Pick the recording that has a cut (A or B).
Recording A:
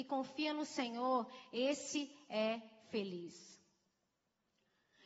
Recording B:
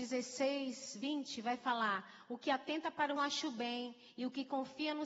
B